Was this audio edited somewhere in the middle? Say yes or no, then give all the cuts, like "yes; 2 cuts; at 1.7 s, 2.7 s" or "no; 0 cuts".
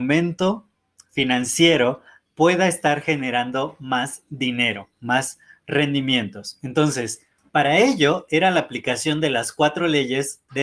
yes; 2 cuts; at 2.3 s, 7.4 s